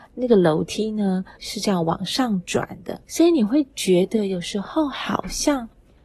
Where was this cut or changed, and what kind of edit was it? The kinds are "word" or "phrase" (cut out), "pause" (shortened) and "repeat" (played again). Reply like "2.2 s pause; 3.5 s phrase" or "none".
1.4 s pause; 3.0 s pause